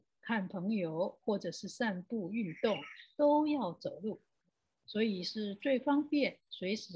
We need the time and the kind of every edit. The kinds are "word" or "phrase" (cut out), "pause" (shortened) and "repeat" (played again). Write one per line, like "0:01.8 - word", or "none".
none